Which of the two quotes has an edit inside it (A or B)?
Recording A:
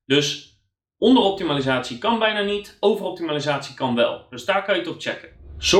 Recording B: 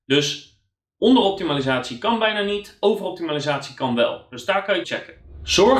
B